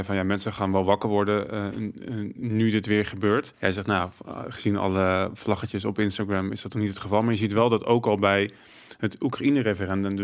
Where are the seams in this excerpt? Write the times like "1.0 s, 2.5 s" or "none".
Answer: 3.5 s